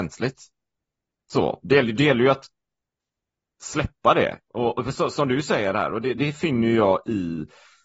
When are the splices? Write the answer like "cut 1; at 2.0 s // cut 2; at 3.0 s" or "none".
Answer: cut 1; at 6.1 s